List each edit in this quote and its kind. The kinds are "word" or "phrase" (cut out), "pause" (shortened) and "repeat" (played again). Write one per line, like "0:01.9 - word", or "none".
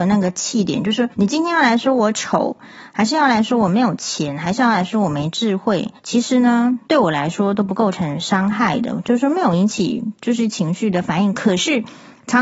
0:01.1 - pause
0:06.0 - pause
0:06.8 - pause